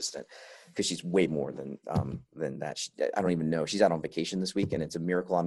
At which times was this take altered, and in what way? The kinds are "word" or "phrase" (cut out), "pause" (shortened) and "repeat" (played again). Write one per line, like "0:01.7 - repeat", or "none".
none

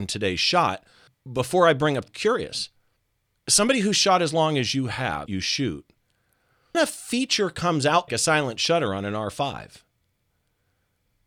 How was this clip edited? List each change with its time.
0:01.1 - pause
0:02.1 - phrase
0:03.0 - pause
0:05.3 - phrase
0:06.7 - word
0:08.1 - word

